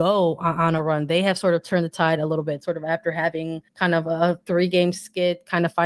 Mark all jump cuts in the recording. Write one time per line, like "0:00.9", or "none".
0:03.7